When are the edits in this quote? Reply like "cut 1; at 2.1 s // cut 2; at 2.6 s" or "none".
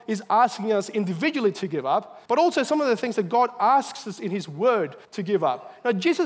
cut 1; at 2.3 s // cut 2; at 5.0 s